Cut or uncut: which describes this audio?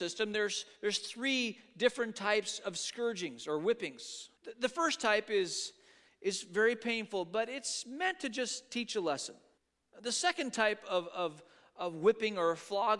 cut